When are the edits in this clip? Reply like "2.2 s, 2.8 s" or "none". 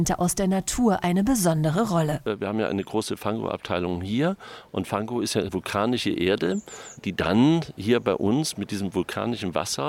none

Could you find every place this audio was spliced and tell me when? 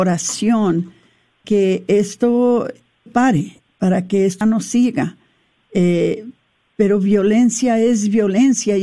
1.4 s, 3.1 s, 4.4 s

